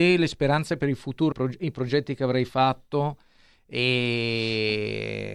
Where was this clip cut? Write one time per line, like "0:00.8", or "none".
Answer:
0:01.3